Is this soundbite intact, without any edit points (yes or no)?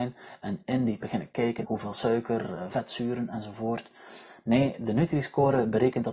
no